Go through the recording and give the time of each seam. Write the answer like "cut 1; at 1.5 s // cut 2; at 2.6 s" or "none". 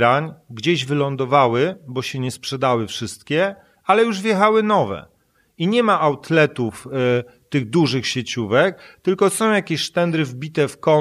none